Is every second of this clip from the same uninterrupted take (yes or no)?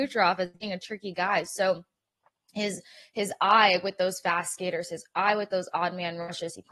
yes